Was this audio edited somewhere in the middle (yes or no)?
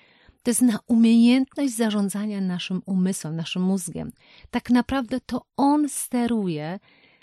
no